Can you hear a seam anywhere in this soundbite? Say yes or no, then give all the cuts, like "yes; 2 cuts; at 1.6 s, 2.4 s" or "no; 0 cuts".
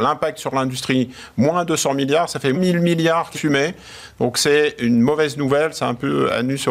yes; 2 cuts; at 2.5 s, 3.3 s